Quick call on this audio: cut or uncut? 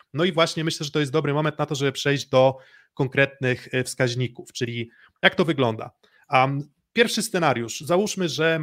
uncut